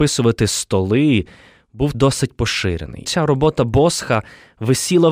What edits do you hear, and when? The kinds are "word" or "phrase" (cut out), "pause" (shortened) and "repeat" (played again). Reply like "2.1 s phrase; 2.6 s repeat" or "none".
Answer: 1.9 s word; 3.0 s word